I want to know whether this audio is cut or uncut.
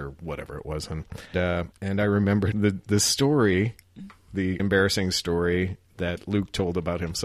cut